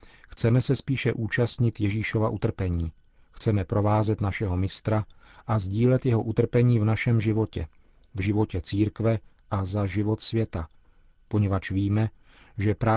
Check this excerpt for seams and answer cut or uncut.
uncut